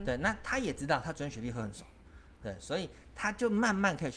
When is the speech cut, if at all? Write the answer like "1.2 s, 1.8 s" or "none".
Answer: none